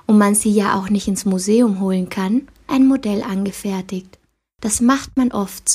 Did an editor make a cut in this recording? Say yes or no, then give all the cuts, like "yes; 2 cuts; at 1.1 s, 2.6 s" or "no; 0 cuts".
yes; 1 cut; at 2.7 s